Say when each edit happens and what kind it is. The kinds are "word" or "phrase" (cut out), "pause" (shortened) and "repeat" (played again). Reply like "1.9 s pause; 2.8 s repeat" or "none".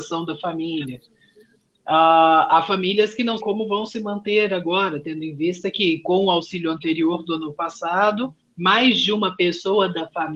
3.4 s word